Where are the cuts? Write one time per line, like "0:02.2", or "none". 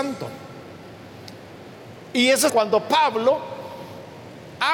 0:02.5